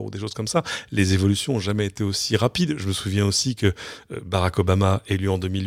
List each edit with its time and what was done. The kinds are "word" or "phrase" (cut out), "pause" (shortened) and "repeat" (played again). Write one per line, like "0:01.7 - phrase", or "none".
none